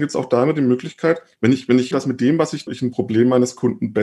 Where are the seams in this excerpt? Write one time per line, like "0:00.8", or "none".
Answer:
0:01.9
0:02.7